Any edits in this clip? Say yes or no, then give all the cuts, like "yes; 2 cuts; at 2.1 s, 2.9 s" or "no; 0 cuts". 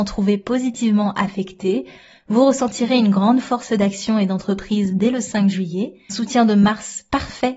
yes; 1 cut; at 6.1 s